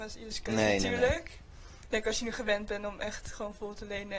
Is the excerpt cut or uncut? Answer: uncut